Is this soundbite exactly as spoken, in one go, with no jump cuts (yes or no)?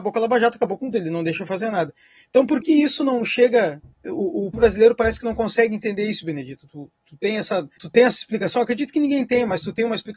no